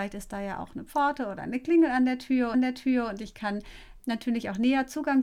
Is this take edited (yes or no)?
yes